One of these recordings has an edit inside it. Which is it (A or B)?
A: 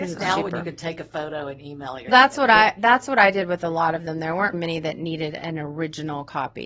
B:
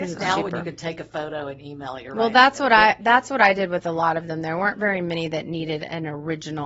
A